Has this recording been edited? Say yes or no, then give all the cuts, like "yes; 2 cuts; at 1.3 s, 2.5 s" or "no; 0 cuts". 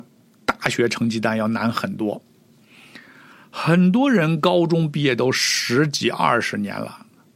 no; 0 cuts